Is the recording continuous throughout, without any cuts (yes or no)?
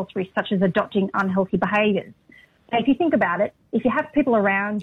yes